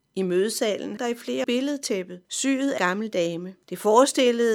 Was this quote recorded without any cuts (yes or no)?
no